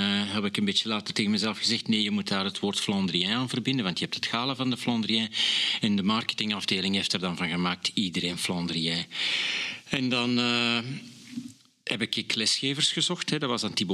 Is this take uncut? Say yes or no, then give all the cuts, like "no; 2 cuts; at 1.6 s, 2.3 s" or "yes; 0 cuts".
yes; 0 cuts